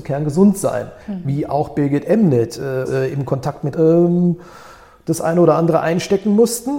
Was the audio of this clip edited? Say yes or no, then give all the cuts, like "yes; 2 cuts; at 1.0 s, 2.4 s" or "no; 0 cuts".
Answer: yes; 3 cuts; at 1.0 s, 2.8 s, 3.7 s